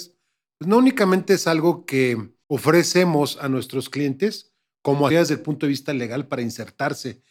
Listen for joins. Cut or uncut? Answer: cut